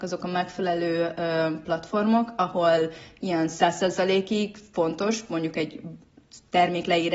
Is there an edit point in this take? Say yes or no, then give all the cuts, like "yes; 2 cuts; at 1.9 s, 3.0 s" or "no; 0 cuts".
no; 0 cuts